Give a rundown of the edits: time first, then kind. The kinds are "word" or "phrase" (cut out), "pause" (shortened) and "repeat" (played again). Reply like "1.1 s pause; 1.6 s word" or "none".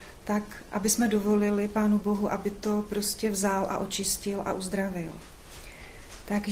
none